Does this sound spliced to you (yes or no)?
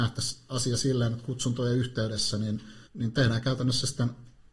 yes